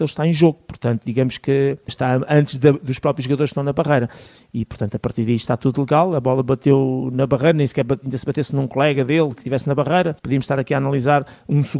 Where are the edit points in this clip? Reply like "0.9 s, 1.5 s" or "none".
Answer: 1.9 s, 10.2 s